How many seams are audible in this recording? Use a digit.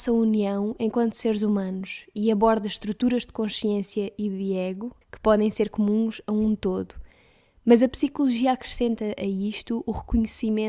1